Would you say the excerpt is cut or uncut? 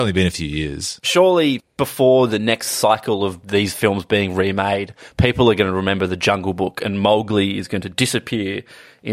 uncut